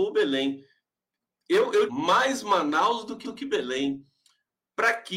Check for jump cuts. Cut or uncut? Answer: cut